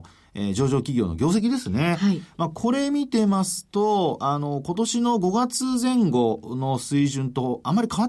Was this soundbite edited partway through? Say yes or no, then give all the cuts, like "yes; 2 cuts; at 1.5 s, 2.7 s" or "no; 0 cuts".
no; 0 cuts